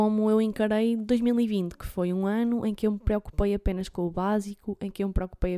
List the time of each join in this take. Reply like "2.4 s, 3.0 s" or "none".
none